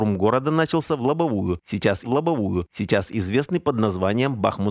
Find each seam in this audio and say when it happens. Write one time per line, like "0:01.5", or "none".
0:02.0

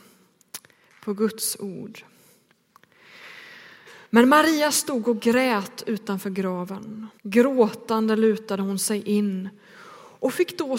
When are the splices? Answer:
0:04.1
0:07.2

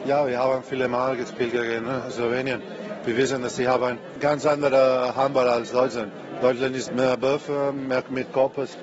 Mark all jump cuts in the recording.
0:06.9

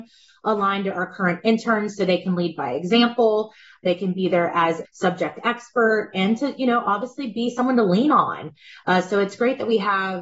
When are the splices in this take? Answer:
0:04.8

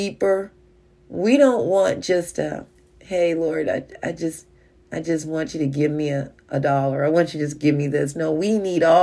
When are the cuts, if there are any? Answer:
none

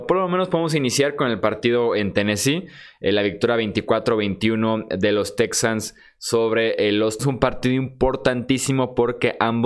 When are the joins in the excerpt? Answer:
0:07.2

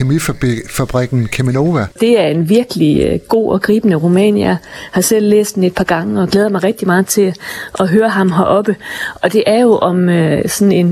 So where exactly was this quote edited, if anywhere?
0:01.9

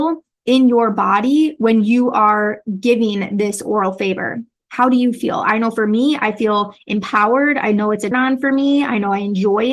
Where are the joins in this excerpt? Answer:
0:08.1

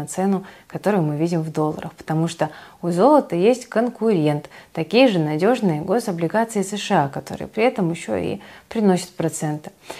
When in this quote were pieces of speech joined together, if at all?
none

